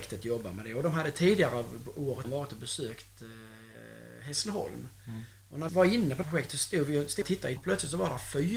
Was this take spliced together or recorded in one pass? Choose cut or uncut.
cut